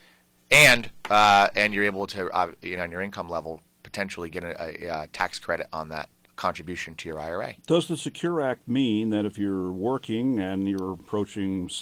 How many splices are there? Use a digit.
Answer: 3